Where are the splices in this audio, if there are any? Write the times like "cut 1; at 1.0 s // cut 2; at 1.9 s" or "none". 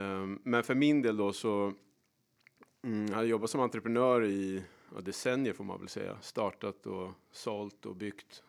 none